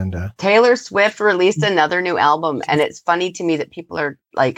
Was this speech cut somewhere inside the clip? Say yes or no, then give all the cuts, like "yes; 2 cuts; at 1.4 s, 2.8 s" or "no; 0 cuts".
no; 0 cuts